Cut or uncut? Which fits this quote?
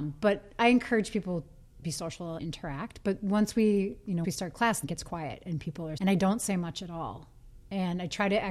cut